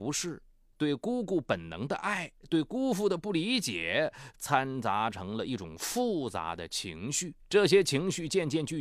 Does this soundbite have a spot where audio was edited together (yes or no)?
yes